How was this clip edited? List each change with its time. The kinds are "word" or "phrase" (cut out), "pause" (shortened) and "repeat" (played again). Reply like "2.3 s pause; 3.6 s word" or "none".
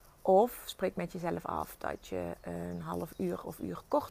none